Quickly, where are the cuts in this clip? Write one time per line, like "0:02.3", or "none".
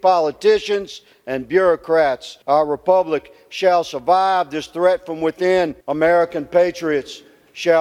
0:02.4
0:05.8